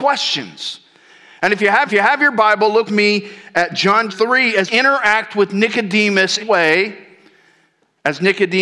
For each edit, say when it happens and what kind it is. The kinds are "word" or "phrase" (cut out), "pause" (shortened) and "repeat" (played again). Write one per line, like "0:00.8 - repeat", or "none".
0:01.9 - repeat
0:02.9 - word
0:04.1 - word
0:04.7 - phrase
0:06.4 - phrase